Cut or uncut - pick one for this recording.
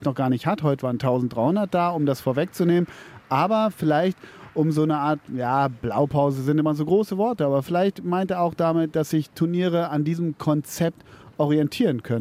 uncut